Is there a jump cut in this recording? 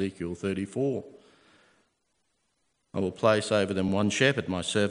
no; 0 cuts

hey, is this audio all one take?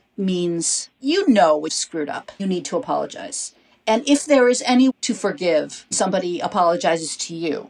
no; 4 cuts; at 1.7 s, 2.4 s, 4.9 s, 5.9 s

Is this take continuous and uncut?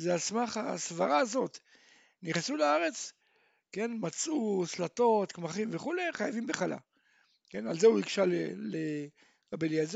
yes; 0 cuts

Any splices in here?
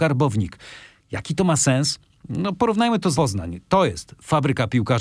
yes; 1 cut; at 3.1 s

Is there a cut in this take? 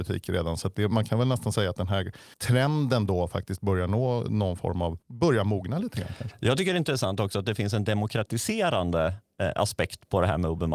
yes; 2 cuts; at 2.3 s, 5.0 s

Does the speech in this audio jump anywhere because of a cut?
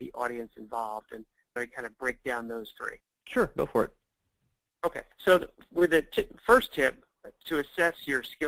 yes; 3 cuts; at 1.6 s, 3.0 s, 5.1 s

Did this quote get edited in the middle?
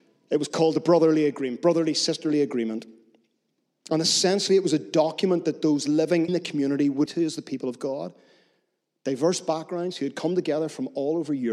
yes; 2 cuts; at 6.3 s, 7.1 s

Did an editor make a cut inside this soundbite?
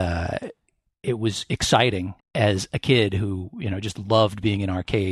yes; 1 cut; at 2.2 s

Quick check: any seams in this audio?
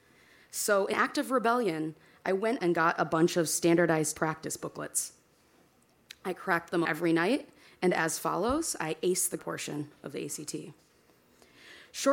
yes; 5 cuts; at 0.9 s, 2.6 s, 4.1 s, 6.8 s, 9.4 s

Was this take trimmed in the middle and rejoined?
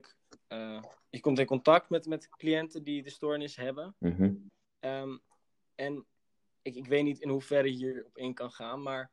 yes; 1 cut; at 4.5 s

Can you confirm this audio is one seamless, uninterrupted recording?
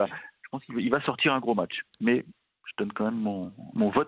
yes; 0 cuts

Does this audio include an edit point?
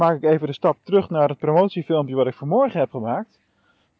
no; 0 cuts

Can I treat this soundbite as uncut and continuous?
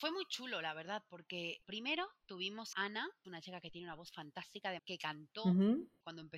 no; 4 cuts; at 1.6 s, 2.7 s, 3.2 s, 4.8 s

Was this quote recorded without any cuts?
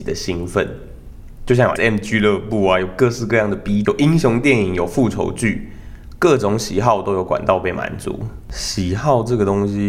no; 2 cuts; at 1.8 s, 3.8 s

